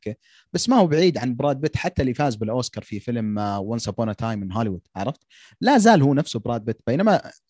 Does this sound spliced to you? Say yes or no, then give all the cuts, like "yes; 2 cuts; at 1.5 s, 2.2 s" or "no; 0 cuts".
no; 0 cuts